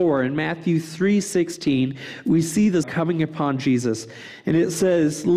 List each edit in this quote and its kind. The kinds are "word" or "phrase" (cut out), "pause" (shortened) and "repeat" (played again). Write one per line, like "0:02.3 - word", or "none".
0:02.8 - phrase